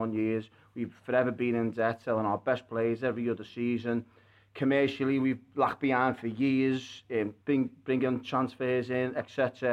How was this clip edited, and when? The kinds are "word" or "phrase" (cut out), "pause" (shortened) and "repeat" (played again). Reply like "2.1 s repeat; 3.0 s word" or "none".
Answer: 7.4 s pause